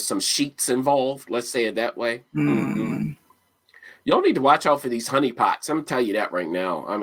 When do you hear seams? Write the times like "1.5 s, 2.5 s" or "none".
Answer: none